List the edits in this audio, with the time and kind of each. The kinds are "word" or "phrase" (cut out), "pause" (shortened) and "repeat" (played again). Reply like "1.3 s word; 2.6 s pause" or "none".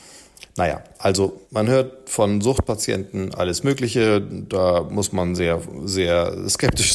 1.5 s pause